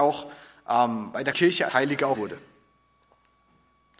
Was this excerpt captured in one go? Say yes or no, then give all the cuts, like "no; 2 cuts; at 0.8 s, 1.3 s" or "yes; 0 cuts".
no; 3 cuts; at 1.3 s, 1.7 s, 2.1 s